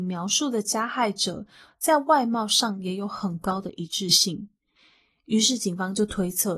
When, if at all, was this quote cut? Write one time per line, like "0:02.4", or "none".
none